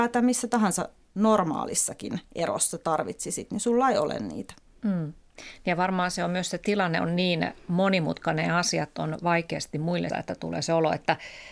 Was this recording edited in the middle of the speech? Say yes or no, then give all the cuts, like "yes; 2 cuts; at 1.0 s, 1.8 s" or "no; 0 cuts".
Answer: yes; 1 cut; at 10.1 s